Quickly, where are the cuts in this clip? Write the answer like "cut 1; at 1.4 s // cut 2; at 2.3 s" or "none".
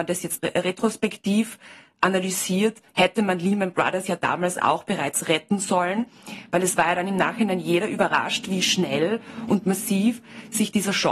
cut 1; at 2.9 s